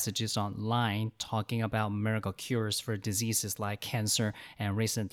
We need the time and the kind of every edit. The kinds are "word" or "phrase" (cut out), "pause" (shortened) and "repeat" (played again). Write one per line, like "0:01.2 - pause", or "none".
none